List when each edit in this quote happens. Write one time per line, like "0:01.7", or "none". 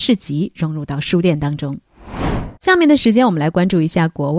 0:02.6